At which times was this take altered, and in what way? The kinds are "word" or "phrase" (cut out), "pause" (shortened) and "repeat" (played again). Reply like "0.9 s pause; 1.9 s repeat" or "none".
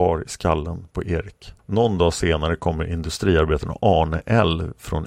1.6 s pause